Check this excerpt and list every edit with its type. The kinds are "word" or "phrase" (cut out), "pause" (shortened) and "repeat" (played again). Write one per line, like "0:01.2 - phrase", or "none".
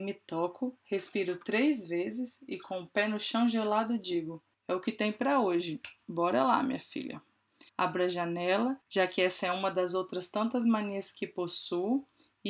0:04.5 - pause
0:07.7 - pause
0:08.8 - pause